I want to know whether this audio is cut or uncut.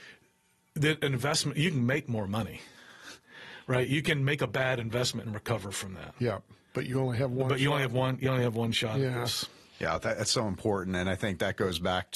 uncut